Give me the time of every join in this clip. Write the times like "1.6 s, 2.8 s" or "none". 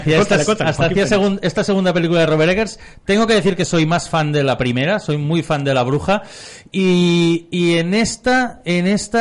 none